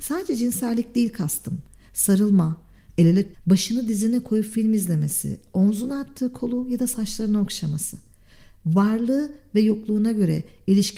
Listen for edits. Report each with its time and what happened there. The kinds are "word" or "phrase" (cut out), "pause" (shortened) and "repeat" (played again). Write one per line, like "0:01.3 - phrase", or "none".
0:03.3 - word